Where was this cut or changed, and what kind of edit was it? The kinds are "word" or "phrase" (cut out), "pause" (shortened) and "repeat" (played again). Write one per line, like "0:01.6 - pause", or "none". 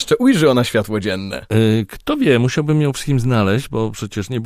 0:02.9 - word

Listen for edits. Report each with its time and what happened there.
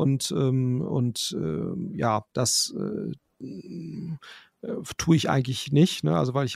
none

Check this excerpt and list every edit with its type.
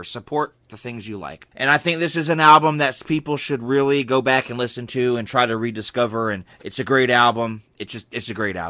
0:01.5 - pause
0:06.5 - pause

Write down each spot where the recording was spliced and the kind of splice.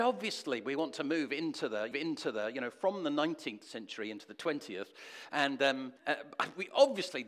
0:01.9 - repeat
0:06.0 - pause

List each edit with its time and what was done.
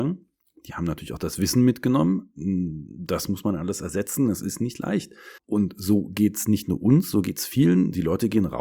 0:05.4 - pause

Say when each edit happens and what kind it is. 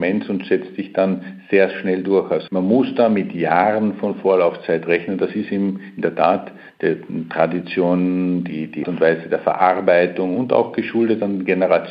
0:02.5 - phrase
0:08.8 - word

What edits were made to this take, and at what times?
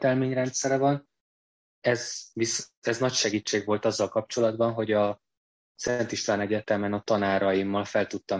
none

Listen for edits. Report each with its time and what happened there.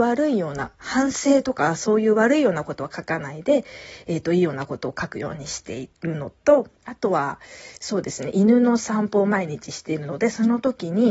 0:06.8 - pause

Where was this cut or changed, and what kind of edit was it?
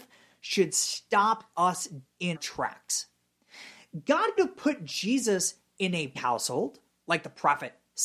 0:02.0 - word
0:02.4 - word
0:04.4 - word
0:06.2 - word

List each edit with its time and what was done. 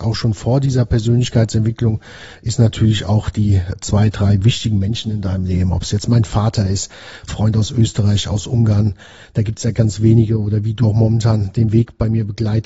0:07.3 - word
0:09.7 - word
0:10.8 - word

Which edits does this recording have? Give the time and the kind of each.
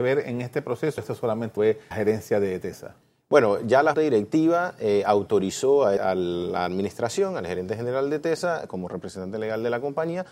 0:01.0 - word
0:01.6 - word
0:01.9 - word
0:03.9 - word
0:06.0 - word

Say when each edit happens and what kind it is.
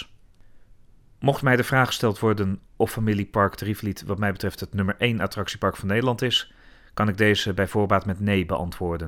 0:02.7 - pause

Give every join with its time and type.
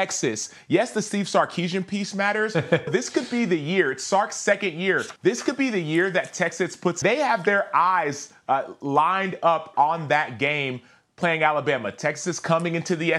0:02.9 - word
0:05.2 - pause
0:07.0 - phrase

